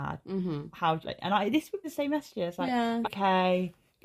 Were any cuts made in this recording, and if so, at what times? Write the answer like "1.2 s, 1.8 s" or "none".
1.0 s, 1.8 s, 3.0 s